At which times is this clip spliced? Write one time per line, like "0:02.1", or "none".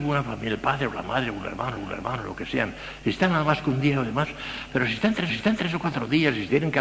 0:01.8
0:05.3